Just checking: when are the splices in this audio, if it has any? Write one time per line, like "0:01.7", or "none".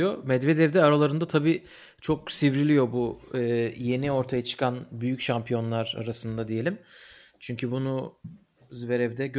none